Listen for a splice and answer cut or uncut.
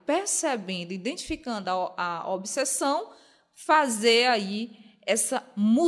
uncut